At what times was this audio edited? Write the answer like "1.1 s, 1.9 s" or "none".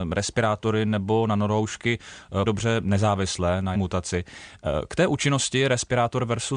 2.5 s, 3.7 s